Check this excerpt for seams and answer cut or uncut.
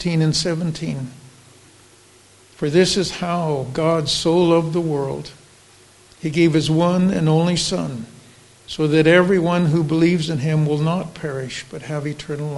uncut